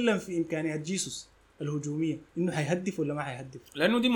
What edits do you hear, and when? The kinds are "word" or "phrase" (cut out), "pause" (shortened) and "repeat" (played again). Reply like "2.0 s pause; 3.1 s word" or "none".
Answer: 2.3 s pause